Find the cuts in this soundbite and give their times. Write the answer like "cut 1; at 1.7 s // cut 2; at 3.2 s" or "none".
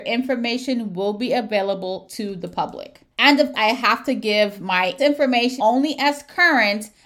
cut 1; at 3.1 s // cut 2; at 3.5 s // cut 3; at 5.0 s // cut 4; at 5.6 s